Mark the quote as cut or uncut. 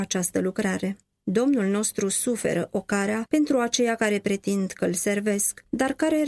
cut